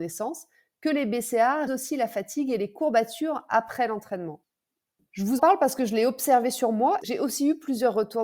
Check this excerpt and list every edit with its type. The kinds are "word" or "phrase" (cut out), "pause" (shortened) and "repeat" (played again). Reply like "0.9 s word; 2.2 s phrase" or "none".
1.7 s word; 5.4 s word; 7.0 s phrase

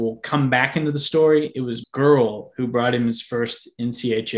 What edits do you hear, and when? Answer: 1.8 s word

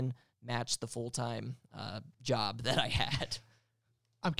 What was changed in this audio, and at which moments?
2.1 s pause

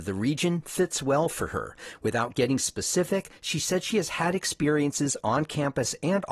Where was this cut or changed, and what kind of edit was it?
none

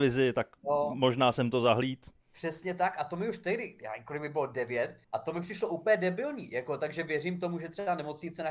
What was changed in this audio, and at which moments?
2.2 s pause; 5.0 s pause

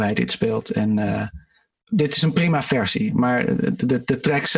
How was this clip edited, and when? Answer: none

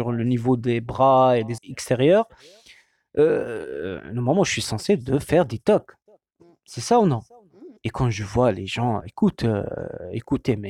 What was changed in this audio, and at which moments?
1.6 s word; 7.8 s pause; 9.0 s word

